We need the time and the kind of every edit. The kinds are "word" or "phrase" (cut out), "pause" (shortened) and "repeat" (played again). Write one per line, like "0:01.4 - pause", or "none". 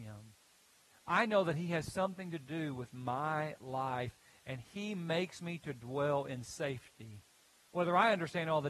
none